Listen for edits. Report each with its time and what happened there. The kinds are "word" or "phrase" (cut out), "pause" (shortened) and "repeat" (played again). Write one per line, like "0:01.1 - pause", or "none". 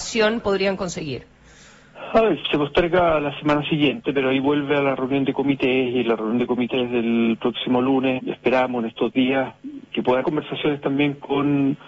0:02.4 - word
0:08.2 - word
0:09.9 - word
0:10.2 - word